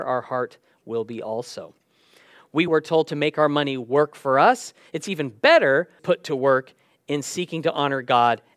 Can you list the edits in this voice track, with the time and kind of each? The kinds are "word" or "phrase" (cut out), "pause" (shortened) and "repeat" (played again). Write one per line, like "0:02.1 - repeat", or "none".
0:02.7 - phrase
0:06.0 - phrase